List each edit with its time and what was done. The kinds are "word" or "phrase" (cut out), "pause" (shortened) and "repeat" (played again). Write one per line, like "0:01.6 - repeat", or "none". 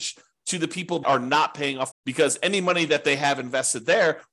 0:01.0 - word
0:01.9 - phrase

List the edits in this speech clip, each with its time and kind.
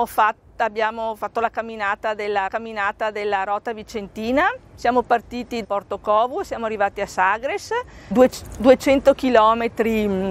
0:02.5 - repeat
0:05.6 - word
0:08.1 - word

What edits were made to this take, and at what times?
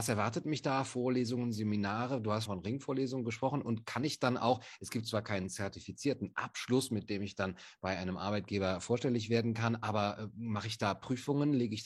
0:02.4 - word

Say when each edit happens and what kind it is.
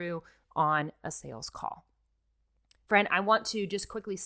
none

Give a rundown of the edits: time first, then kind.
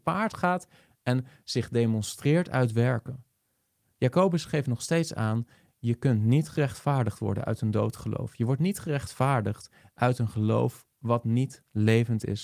none

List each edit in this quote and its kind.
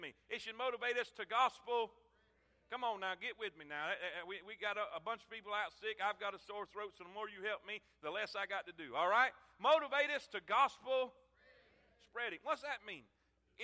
none

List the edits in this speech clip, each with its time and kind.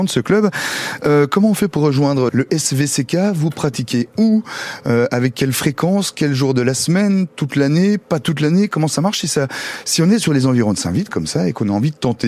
0:02.3 - word

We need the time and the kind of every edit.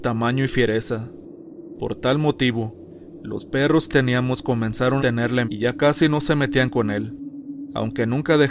0:03.9 - word
0:05.0 - word
0:05.4 - word

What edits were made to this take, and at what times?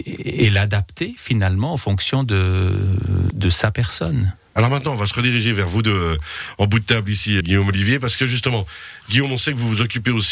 0:03.3 - word
0:07.4 - word

